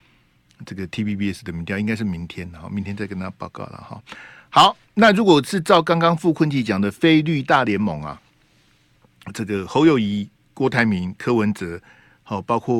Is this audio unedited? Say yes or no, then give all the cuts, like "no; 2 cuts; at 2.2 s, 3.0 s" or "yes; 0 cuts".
yes; 0 cuts